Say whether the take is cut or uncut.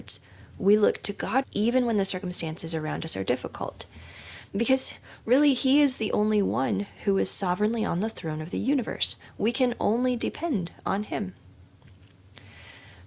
cut